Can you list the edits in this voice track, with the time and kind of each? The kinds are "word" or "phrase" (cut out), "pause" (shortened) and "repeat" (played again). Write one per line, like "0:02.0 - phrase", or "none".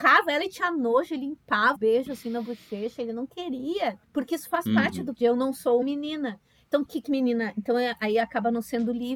0:01.8 - word
0:04.0 - pause
0:05.1 - word
0:05.8 - word
0:06.9 - word